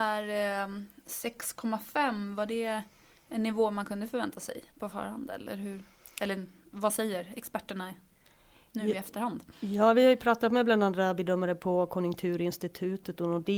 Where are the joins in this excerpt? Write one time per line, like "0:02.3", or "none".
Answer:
0:04.7